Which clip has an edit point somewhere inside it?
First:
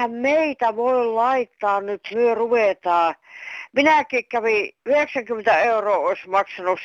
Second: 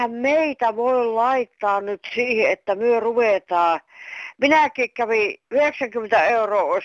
first; 1 cut; at 2.1 s

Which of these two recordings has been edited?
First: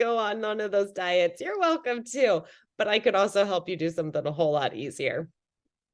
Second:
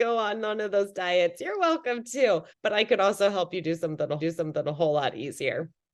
second; 2 cuts; at 2.5 s, 4.2 s

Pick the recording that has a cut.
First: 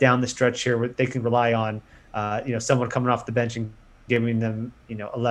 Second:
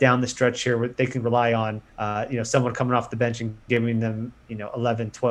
second; 2 cuts; at 1.9 s, 3.6 s

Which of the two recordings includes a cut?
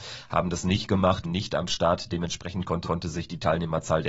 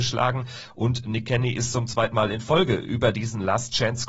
first; 2 cuts; at 1.2 s, 2.8 s

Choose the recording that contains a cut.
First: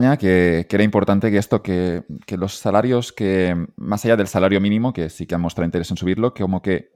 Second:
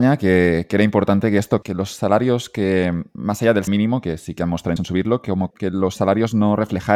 second; 4 cuts; at 1.6 s, 3.7 s, 4.8 s, 5.5 s

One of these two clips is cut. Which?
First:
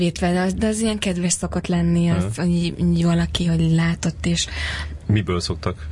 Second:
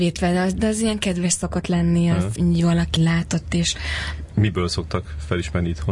second; 2 cuts; at 2.4 s, 3.0 s

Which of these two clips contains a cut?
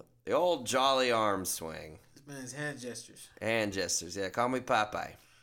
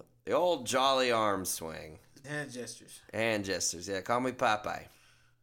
second; 1 cut; at 2.2 s

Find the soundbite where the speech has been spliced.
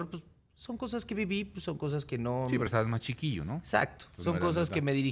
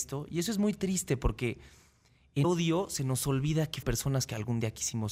second; 2 cuts; at 2.4 s, 3.8 s

